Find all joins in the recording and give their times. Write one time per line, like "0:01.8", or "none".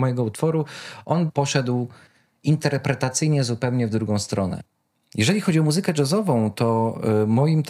none